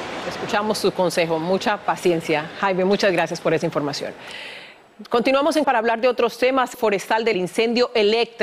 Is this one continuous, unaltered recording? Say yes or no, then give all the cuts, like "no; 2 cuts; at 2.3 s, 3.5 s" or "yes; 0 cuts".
no; 3 cuts; at 5.6 s, 6.7 s, 7.3 s